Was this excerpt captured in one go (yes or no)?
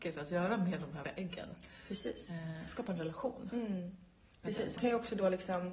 no